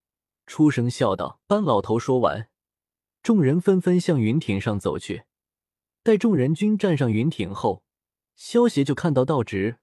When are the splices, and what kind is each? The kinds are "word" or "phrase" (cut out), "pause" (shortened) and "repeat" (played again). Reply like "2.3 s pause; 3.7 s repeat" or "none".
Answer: 1.4 s pause